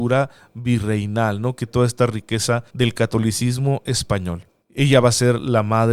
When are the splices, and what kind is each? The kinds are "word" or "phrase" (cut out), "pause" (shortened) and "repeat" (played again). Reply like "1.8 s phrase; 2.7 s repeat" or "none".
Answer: 1.7 s word; 2.7 s pause; 4.6 s pause

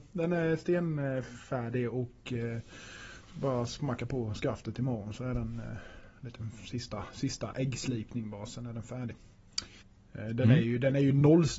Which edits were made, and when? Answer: 9.8 s pause

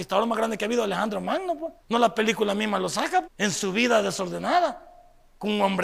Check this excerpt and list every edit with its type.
1.8 s pause; 3.2 s word

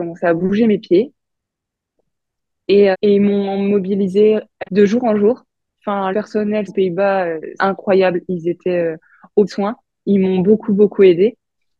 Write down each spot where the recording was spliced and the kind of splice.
2.9 s word; 4.6 s word; 6.1 s word; 6.7 s word; 7.6 s word; 9.5 s word

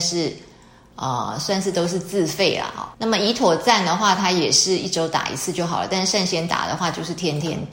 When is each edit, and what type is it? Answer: 2.9 s pause

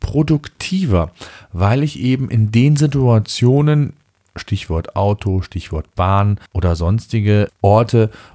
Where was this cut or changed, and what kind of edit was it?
6.5 s pause

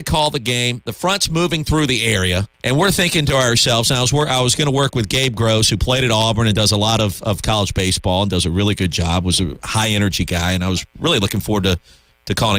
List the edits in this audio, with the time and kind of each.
2.5 s pause

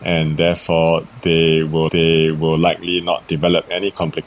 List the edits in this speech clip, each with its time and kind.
1.9 s repeat

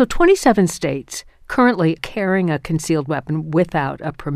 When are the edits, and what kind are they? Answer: 2.0 s word

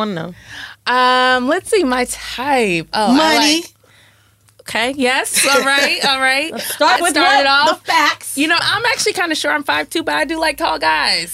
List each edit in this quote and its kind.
7.0 s word; 8.6 s word

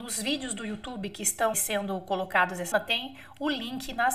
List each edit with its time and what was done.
1.5 s word; 2.7 s word

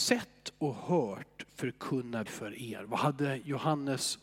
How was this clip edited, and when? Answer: 2.3 s word

